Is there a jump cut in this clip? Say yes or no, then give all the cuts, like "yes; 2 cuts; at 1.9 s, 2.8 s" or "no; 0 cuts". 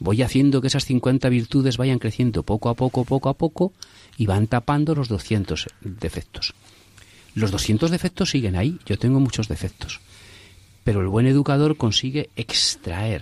no; 0 cuts